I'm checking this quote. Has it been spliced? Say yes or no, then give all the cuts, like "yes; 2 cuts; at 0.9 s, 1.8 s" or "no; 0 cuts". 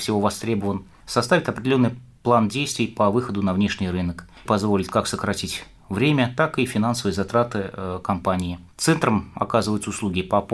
yes; 2 cuts; at 4.5 s, 8.7 s